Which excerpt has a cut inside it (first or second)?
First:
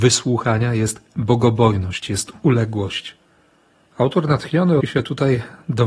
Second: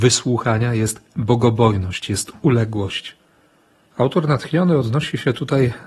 first